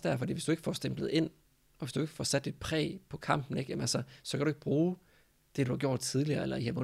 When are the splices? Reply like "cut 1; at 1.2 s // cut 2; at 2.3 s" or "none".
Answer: none